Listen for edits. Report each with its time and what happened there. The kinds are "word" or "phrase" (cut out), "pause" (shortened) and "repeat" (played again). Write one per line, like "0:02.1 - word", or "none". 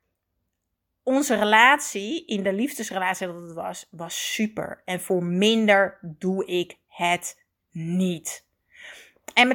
none